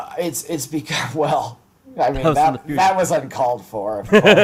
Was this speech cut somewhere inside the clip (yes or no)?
no